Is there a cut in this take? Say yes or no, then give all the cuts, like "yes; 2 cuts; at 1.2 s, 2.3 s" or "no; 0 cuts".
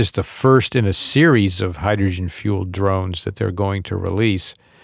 no; 0 cuts